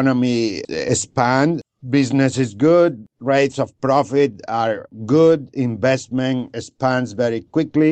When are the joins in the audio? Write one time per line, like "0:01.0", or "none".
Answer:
none